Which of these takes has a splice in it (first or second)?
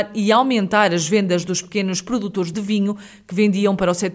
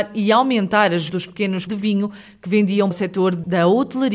second